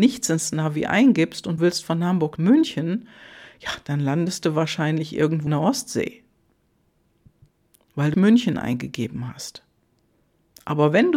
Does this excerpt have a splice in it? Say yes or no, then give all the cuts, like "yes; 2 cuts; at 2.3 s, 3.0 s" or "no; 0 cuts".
yes; 4 cuts; at 1.6 s, 2.4 s, 5.5 s, 8.1 s